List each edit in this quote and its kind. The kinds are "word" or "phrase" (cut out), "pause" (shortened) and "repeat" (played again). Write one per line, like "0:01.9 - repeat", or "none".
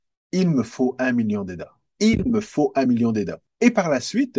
none

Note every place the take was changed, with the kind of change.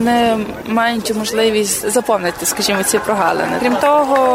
none

